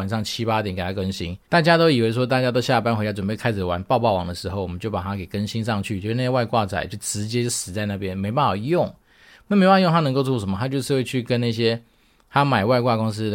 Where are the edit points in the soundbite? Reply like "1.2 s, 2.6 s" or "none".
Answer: 1.4 s